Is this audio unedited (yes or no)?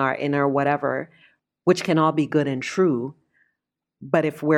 yes